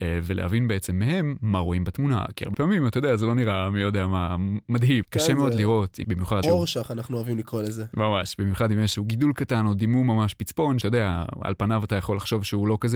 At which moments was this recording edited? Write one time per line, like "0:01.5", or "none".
0:02.5
0:05.0
0:06.0
0:06.4
0:08.9
0:10.8